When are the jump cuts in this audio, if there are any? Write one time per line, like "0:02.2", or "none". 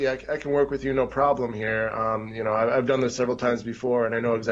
none